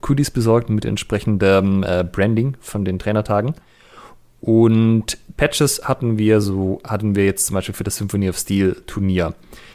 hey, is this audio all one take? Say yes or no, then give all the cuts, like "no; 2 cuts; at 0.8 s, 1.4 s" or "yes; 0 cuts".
yes; 0 cuts